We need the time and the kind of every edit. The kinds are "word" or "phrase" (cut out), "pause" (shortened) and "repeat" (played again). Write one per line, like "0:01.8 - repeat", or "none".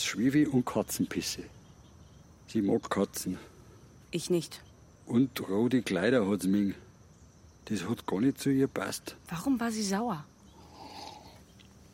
0:02.2 - pause
0:04.8 - pause